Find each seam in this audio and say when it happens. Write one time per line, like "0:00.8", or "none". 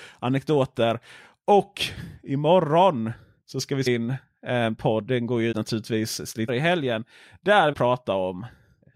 0:03.9
0:05.5
0:06.5
0:07.7